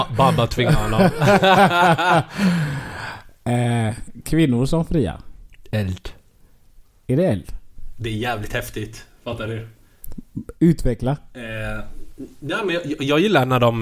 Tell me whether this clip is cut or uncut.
uncut